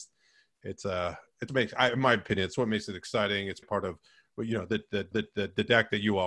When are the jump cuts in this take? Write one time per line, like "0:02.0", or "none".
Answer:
0:01.5
0:03.6
0:05.1